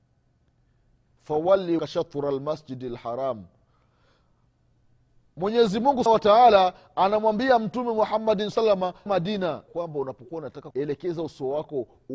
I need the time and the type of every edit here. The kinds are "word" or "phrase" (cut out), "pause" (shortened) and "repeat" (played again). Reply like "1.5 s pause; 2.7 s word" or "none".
1.8 s word; 6.1 s word; 8.5 s word; 9.1 s word; 9.7 s word; 10.7 s word